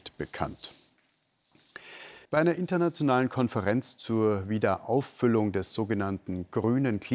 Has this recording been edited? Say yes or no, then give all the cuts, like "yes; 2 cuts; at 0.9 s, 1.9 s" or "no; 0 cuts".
yes; 1 cut; at 2.2 s